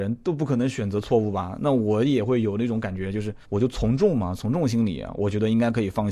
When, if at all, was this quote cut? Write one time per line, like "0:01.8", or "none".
0:03.4